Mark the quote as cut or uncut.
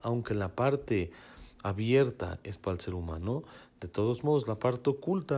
uncut